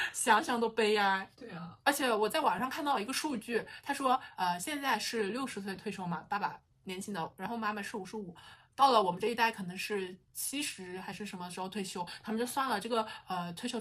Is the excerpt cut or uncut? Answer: cut